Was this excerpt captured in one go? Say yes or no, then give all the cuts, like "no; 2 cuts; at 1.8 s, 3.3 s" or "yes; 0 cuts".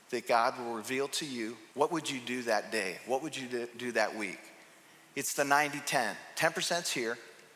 no; 1 cut; at 1.7 s